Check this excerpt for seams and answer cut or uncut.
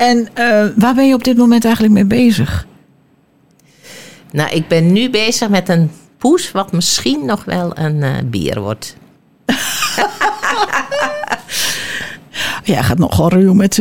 uncut